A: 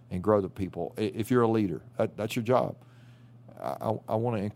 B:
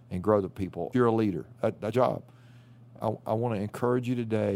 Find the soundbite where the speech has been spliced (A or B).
B